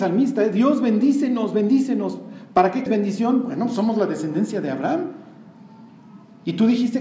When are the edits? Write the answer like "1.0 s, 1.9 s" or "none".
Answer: 2.9 s